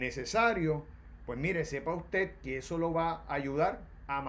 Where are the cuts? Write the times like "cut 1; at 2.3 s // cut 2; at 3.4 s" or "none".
none